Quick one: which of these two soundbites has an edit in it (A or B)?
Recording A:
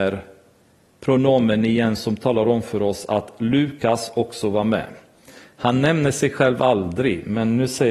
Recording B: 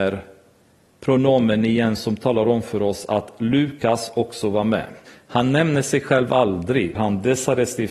B